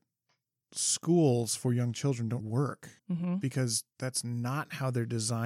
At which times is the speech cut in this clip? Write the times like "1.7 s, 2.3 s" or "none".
2.4 s, 3.0 s, 3.9 s

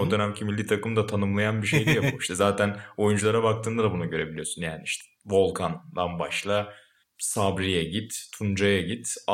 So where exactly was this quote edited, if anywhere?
none

